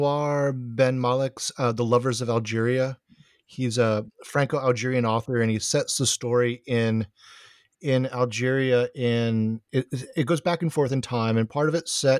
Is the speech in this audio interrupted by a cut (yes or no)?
no